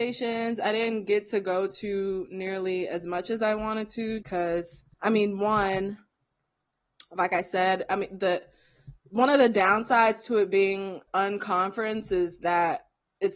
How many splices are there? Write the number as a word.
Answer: four